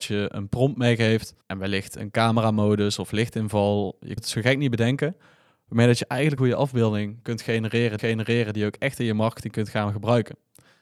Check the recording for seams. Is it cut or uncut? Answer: cut